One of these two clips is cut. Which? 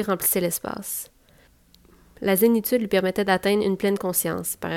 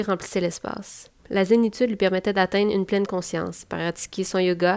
second; 1 cut; at 1.2 s

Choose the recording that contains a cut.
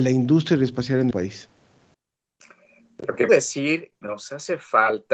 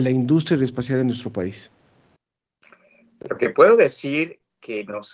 first; 3 cuts; at 1.1 s, 3.3 s, 4.0 s

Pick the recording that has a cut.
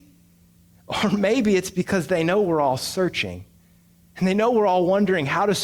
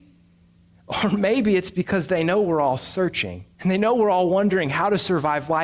second; 1 cut; at 3.5 s

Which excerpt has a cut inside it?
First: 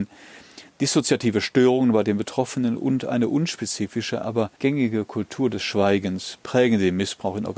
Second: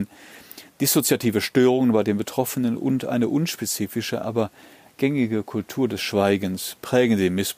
first; 1 cut; at 4.6 s

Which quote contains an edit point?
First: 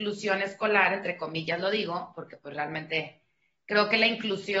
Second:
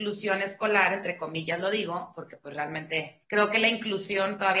second; 1 cut; at 3.2 s

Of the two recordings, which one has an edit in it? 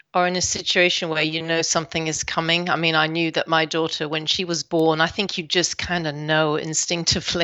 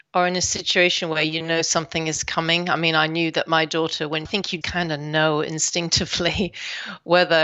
second; 2 cuts; at 4.3 s, 4.6 s

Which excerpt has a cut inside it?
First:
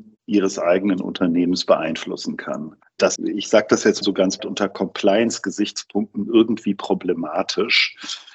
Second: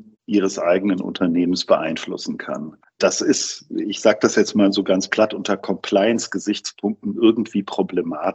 first; 3 cuts; at 3.2 s, 4.0 s, 4.4 s

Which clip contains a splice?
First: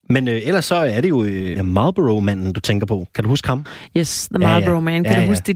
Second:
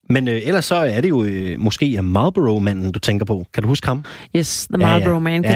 first; 1 cut; at 1.6 s

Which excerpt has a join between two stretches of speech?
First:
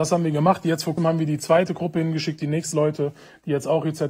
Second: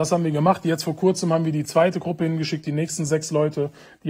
first; 2 cuts; at 1.0 s, 2.7 s

